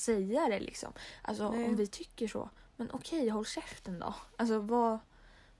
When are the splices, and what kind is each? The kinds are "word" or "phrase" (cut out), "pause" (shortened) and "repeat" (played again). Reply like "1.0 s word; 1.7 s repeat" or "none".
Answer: none